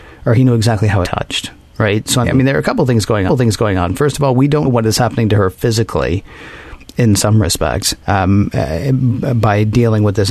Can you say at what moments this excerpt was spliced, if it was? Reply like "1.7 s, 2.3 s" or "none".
1.0 s, 2.2 s, 3.3 s, 4.6 s, 8.0 s